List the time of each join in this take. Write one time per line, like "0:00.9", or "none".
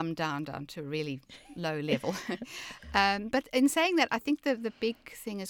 none